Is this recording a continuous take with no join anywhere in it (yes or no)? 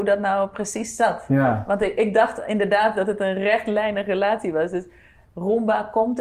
yes